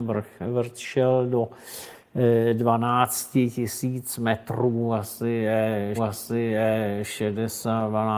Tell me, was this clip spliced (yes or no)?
yes